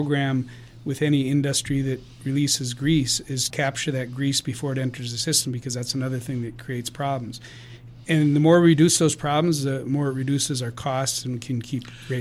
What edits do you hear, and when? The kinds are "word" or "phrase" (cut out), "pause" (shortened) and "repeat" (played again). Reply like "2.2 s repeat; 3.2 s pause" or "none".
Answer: 3.5 s word